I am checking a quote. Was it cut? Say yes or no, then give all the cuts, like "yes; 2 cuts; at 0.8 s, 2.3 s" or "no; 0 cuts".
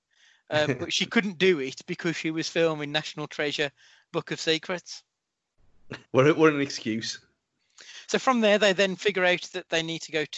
yes; 1 cut; at 6.0 s